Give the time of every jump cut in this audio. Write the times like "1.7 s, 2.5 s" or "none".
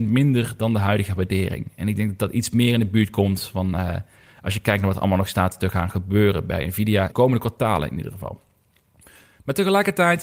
7.1 s